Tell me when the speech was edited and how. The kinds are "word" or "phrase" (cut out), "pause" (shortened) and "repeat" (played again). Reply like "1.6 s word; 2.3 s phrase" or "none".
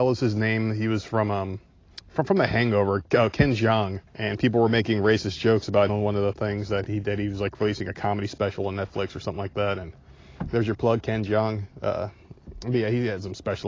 1.9 s pause; 3.3 s word; 4.1 s pause; 5.9 s word; 6.8 s word; 11.7 s pause